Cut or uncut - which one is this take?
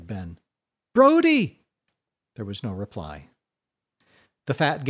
uncut